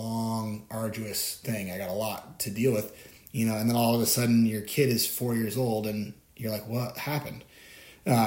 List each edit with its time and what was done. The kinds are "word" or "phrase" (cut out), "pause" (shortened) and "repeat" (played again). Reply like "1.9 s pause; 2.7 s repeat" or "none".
none

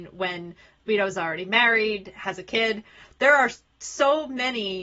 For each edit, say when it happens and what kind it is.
none

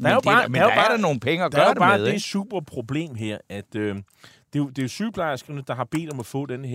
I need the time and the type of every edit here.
none

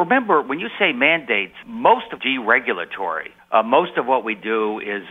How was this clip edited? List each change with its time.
1.6 s word; 2.2 s phrase; 3.4 s pause

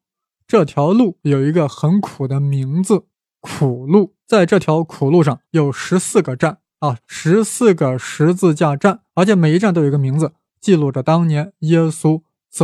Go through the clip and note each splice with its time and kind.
4.2 s pause; 5.4 s pause; 7.0 s pause; 9.1 s pause

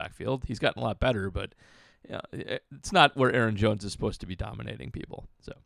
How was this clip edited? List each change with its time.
none

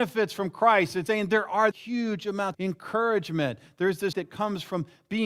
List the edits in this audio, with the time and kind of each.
1.1 s word; 1.7 s word; 2.5 s word; 4.1 s word

